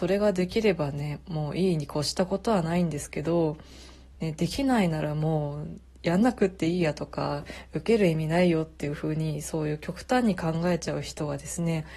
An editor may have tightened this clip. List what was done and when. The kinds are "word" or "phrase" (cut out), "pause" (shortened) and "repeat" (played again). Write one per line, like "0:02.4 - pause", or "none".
none